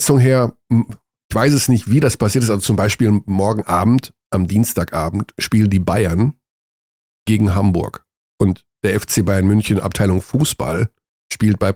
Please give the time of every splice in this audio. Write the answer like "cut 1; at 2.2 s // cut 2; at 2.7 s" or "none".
none